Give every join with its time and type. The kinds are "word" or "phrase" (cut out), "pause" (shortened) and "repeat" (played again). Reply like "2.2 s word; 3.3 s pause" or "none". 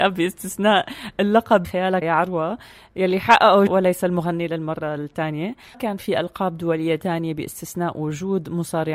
1.6 s phrase; 2.0 s word; 3.7 s phrase; 5.7 s word